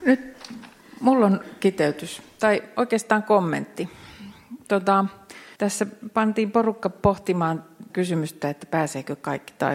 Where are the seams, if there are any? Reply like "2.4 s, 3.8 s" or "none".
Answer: 5.6 s, 7.9 s